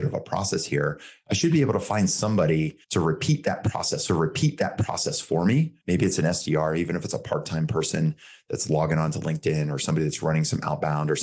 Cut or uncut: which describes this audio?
cut